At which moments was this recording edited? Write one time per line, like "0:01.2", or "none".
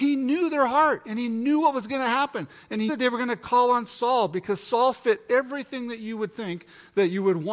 0:02.9

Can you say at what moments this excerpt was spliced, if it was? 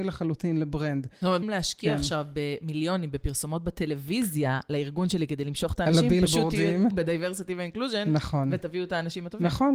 0:01.4
0:06.9

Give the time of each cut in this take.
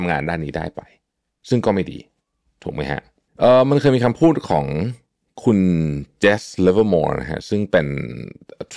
none

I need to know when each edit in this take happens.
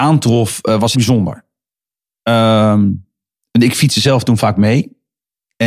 0:00.9

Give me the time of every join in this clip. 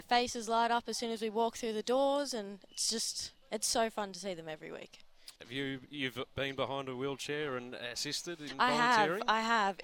0:05.4

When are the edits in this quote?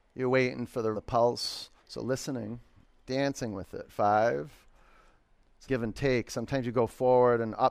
0:00.9
0:01.8
0:03.0
0:05.7

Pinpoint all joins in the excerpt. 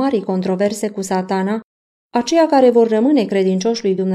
none

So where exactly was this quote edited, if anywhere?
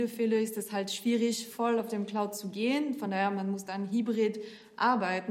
none

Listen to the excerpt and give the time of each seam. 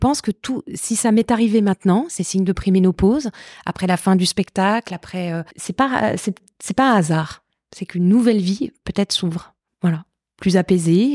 0:05.5
0:09.6

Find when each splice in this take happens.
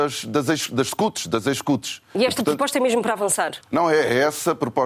0:03.6

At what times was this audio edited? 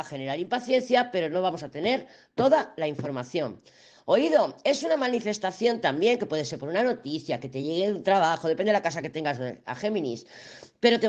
none

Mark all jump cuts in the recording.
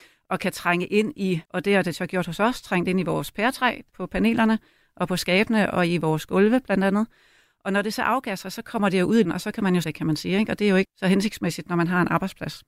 0:01.4
0:09.2
0:09.8
0:10.8

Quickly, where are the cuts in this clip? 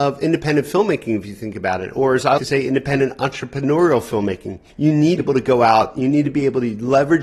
0:02.4
0:04.7
0:05.2

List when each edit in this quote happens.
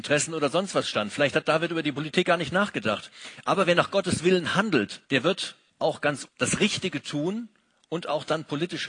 0:05.0
0:05.7
0:06.3

